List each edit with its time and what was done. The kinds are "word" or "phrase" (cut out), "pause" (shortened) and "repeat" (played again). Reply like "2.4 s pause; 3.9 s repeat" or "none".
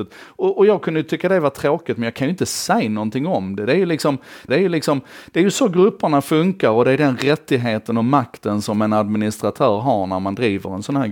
4.5 s repeat